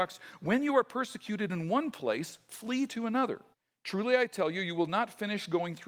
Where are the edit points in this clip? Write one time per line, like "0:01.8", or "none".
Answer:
0:03.5